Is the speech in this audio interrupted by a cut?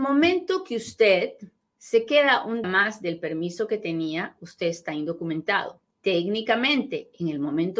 yes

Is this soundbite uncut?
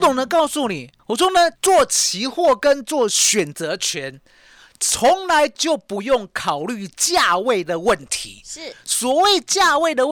no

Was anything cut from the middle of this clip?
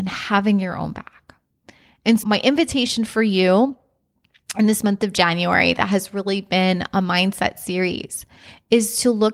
yes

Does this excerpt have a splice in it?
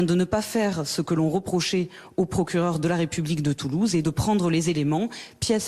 yes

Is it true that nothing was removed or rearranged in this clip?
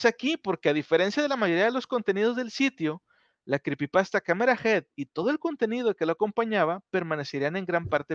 yes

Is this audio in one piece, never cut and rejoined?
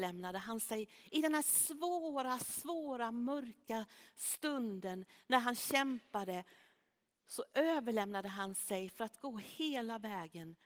yes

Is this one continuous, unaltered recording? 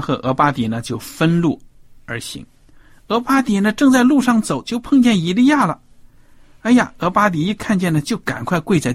yes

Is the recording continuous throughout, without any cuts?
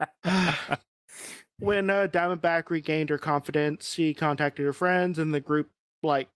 yes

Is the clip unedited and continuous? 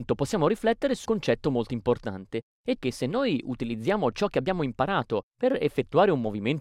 no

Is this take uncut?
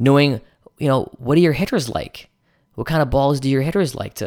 yes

